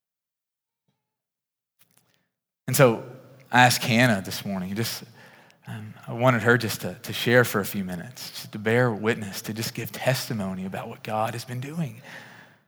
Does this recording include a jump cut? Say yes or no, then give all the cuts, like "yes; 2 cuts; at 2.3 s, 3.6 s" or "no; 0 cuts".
no; 0 cuts